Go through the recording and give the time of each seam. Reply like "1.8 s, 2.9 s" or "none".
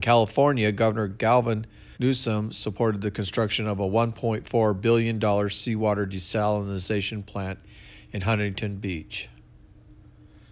2.0 s